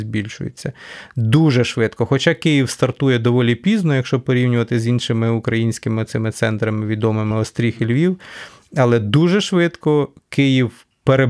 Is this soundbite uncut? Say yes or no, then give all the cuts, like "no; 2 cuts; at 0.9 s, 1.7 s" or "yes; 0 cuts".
yes; 0 cuts